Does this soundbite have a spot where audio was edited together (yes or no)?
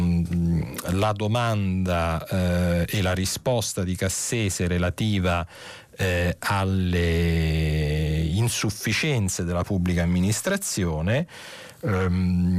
no